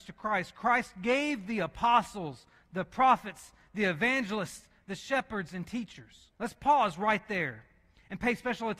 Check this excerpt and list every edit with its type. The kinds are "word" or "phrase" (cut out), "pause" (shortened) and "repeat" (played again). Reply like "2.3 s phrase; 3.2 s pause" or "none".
6.3 s pause